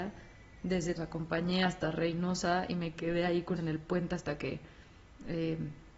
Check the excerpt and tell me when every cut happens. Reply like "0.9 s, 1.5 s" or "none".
1.0 s, 3.6 s